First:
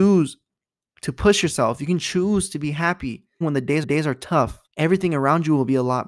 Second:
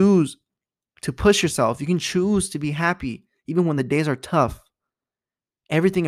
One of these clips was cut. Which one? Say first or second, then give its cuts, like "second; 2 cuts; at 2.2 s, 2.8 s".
first; 3 cuts; at 3.4 s, 3.8 s, 4.7 s